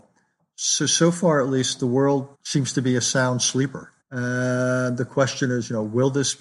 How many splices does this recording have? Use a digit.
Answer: 2